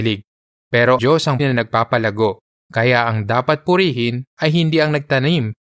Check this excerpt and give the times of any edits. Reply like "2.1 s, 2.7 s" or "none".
1.0 s, 1.4 s